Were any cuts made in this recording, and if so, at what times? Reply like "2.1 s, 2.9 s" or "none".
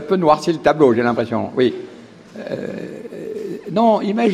none